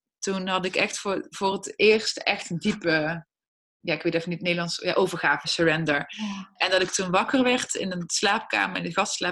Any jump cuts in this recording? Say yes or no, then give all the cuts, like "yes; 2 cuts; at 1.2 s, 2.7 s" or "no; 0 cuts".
no; 0 cuts